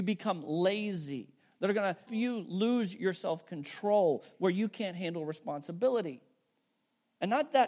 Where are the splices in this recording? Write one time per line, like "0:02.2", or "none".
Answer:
0:02.1